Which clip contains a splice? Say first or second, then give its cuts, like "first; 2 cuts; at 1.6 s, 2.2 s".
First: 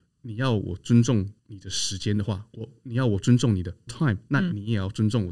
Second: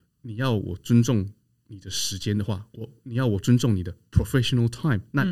first; 2 cuts; at 1.4 s, 3.9 s